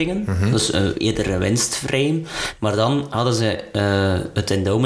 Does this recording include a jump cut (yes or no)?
no